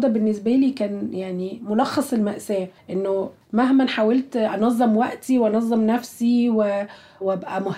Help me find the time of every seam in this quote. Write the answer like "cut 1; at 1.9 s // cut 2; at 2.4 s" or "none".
cut 1; at 2.8 s